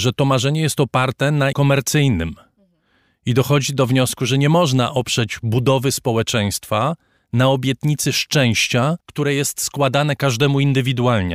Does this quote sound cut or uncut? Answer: cut